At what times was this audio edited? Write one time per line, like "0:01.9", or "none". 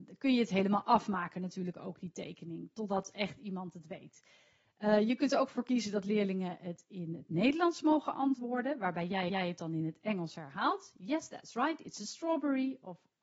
0:09.3